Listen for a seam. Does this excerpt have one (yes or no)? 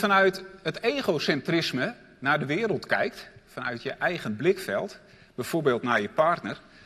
no